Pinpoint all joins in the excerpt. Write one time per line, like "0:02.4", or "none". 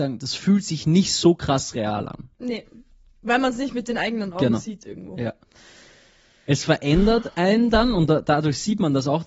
none